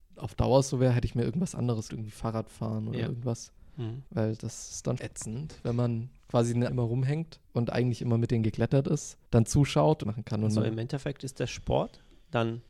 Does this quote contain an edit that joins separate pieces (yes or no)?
yes